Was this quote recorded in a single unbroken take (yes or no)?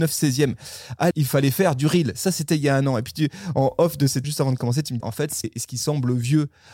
no